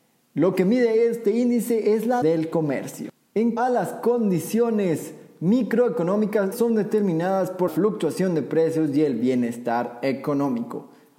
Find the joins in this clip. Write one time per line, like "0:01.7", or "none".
0:02.2
0:03.6
0:06.5
0:07.7